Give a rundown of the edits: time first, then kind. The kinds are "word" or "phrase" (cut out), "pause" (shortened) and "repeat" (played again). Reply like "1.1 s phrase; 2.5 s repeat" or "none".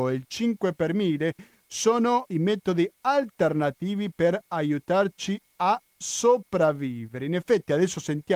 none